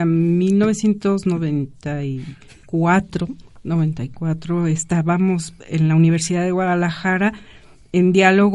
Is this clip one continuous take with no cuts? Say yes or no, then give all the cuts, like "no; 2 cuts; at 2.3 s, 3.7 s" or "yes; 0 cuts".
yes; 0 cuts